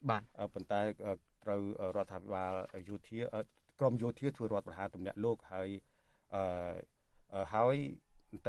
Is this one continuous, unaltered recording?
yes; 0 cuts

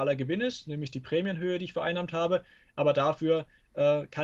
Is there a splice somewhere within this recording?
no; 0 cuts

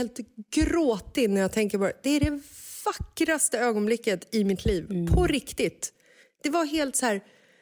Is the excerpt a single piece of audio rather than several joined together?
yes; 0 cuts

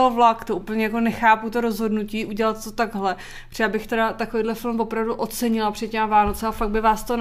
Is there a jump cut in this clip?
no; 0 cuts

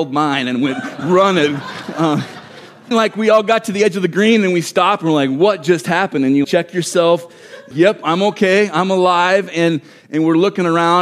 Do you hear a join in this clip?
yes; 3 cuts; at 2.9 s, 6.4 s, 7.7 s

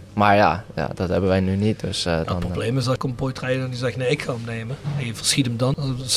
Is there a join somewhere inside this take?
no; 0 cuts

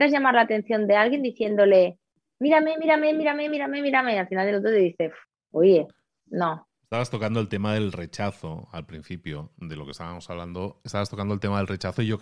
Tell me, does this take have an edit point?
no; 0 cuts

